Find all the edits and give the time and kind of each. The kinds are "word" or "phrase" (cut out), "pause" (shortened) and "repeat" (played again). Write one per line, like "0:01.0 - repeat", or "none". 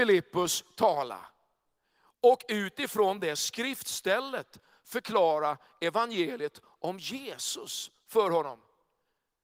none

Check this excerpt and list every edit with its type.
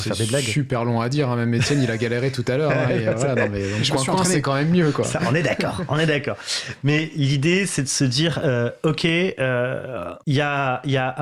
0:10.2 - pause

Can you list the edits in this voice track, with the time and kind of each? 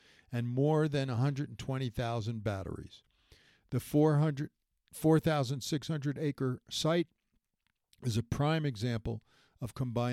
none

